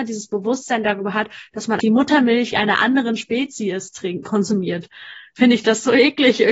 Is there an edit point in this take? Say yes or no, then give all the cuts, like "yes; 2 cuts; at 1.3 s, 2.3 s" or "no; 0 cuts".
yes; 2 cuts; at 1.8 s, 4.2 s